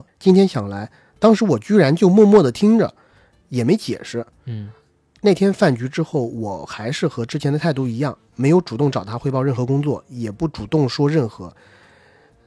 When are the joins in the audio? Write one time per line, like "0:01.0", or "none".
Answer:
none